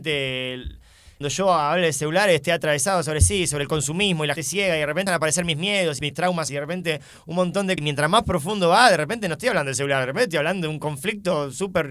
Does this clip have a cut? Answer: yes; 6 cuts; at 1.2 s, 4.4 s, 5.1 s, 6.0 s, 6.5 s, 7.8 s

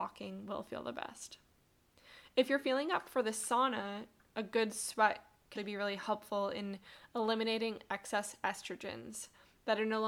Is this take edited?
yes; 1 cut; at 5.6 s

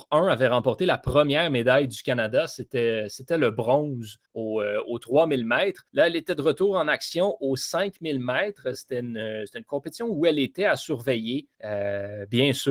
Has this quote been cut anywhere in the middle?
yes; 3 cuts; at 4.3 s, 5.9 s, 11.5 s

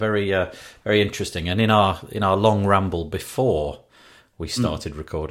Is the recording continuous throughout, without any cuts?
yes; 0 cuts

